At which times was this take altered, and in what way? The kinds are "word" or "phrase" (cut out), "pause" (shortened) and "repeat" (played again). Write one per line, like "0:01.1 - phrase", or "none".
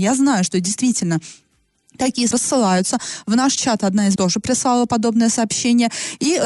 0:02.3 - word
0:04.2 - word